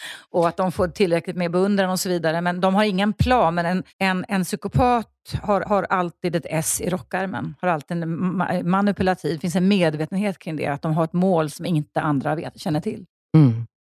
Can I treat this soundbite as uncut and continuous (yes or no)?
no